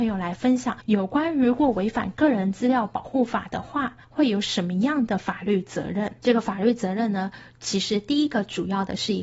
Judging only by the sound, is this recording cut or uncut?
cut